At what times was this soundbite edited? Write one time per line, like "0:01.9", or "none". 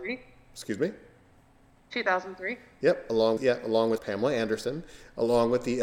0:03.4
0:04.0